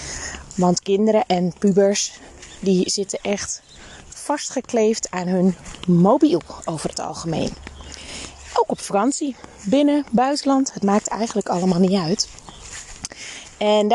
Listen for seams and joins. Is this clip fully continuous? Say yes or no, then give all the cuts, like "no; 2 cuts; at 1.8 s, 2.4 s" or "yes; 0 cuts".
yes; 0 cuts